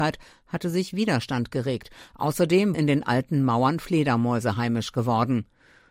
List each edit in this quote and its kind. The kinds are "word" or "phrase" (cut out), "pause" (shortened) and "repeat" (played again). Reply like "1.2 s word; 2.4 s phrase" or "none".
2.7 s word